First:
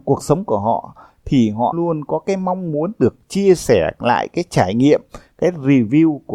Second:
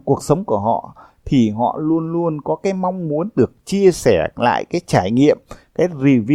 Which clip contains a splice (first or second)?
first